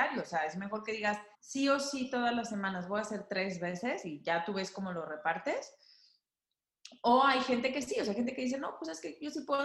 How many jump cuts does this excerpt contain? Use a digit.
1